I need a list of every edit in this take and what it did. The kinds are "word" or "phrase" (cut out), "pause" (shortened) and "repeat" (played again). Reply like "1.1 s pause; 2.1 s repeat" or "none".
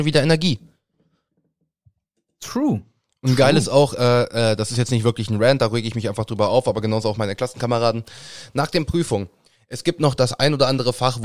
none